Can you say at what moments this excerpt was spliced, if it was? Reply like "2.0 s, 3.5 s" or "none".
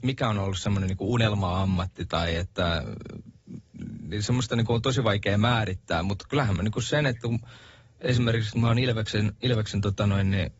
none